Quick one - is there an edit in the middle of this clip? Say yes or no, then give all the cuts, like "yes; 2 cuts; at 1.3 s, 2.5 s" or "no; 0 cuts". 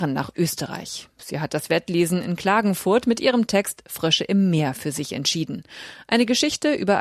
no; 0 cuts